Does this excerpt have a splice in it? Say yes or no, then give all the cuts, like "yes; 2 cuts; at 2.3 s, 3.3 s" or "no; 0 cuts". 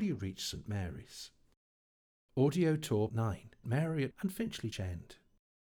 yes; 4 cuts; at 3.1 s, 3.6 s, 4.1 s, 4.7 s